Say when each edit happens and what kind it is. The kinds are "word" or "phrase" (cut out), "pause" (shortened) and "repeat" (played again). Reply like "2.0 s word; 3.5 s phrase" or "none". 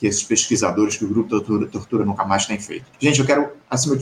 2.9 s pause